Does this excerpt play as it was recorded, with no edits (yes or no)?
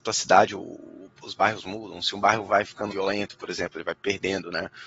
no